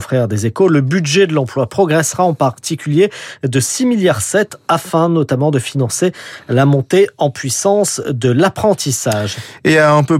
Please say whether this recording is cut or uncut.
uncut